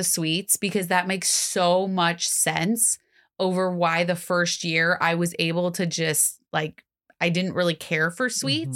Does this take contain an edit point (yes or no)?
no